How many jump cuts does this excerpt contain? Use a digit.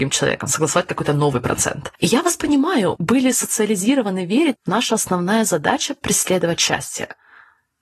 3